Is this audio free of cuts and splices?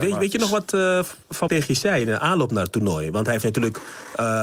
no; 1 cut; at 1.5 s

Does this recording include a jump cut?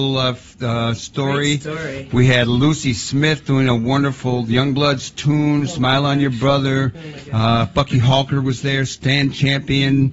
no; 0 cuts

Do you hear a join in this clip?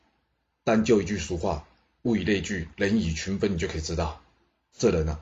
no; 0 cuts

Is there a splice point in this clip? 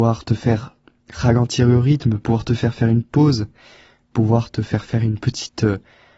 no; 0 cuts

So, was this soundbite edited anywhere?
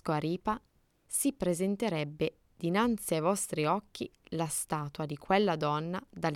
no; 0 cuts

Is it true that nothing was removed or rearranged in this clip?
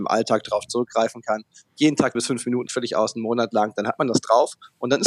no; 2 cuts; at 2.1 s, 2.7 s

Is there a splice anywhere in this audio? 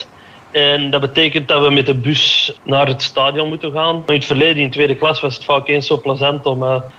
no; 0 cuts

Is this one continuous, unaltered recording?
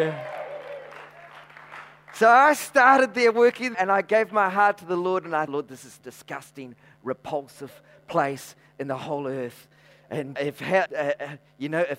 no; 5 cuts; at 3.7 s, 5.5 s, 6.0 s, 10.4 s, 10.9 s

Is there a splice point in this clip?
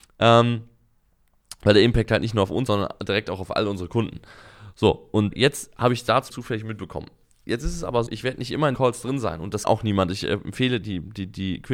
yes; 7 cuts; at 2.7 s, 5.3 s, 6.3 s, 8.1 s, 8.7 s, 9.6 s, 10.8 s

